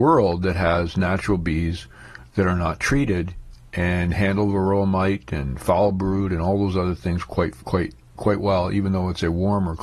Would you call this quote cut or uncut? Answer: cut